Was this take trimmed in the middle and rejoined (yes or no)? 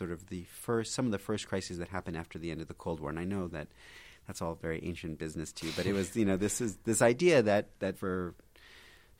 no